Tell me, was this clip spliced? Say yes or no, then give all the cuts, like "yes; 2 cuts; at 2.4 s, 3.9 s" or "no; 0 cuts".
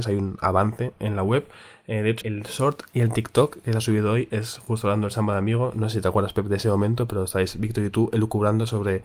yes; 1 cut; at 2.2 s